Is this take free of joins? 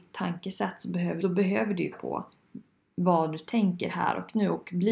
no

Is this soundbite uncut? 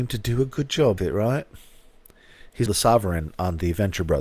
no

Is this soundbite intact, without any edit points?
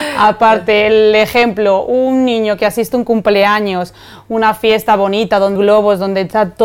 no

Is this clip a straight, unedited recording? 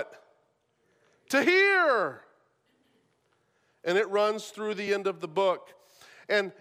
yes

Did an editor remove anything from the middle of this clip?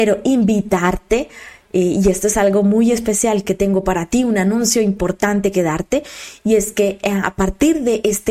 no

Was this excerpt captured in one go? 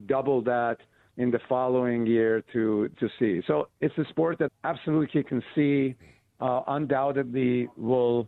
no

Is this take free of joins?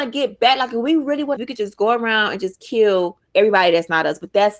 no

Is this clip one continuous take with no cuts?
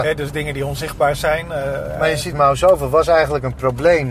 no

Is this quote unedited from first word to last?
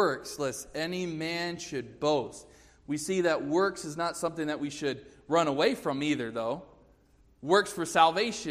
yes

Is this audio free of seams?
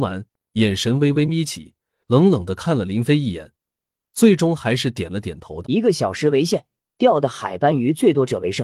no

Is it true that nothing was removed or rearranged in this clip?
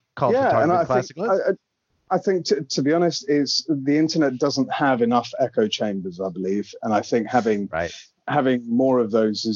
yes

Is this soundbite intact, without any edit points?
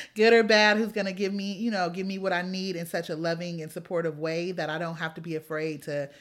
yes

